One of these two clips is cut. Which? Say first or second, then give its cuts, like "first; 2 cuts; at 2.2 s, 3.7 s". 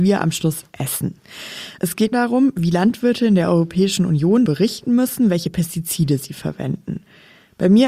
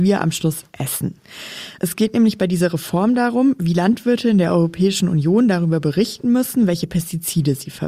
first; 2 cuts; at 2.1 s, 4.5 s